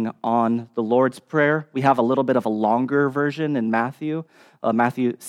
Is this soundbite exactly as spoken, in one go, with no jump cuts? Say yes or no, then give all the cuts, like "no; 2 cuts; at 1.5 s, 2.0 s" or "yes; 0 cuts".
yes; 0 cuts